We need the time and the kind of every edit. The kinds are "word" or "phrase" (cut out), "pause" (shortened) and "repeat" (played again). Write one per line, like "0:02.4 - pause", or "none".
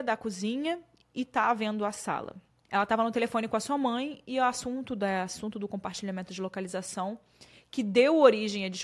none